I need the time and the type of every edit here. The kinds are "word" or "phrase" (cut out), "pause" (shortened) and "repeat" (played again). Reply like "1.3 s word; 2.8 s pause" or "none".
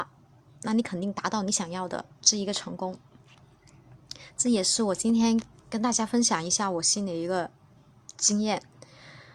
2.1 s pause